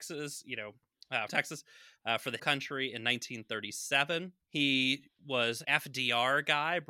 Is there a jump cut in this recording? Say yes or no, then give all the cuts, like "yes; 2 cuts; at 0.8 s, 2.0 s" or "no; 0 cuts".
yes; 4 cuts; at 1.3 s, 2.4 s, 4.4 s, 5.6 s